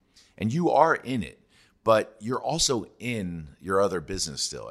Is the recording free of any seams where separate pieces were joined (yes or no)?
yes